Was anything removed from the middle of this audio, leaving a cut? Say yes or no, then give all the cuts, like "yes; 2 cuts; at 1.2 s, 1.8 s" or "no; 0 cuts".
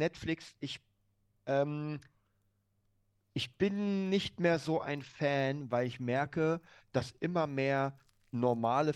no; 0 cuts